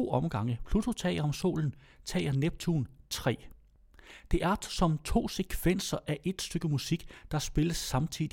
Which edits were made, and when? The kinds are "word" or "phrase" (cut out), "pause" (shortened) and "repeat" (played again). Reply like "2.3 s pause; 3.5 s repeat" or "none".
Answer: none

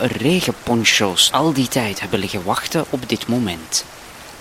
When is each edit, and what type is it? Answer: 1.3 s phrase

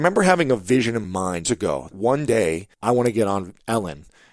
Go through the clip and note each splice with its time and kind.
1.0 s word; 1.4 s word; 1.9 s word; 2.7 s pause

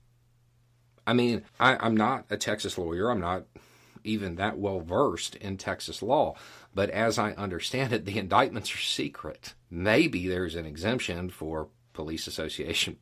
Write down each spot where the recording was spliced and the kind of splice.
1.5 s pause; 9.6 s pause

